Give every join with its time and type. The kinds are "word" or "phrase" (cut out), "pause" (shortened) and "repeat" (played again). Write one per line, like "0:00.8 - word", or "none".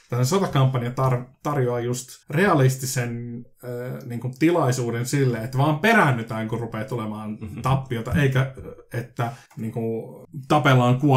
0:02.2 - pause
0:09.5 - pause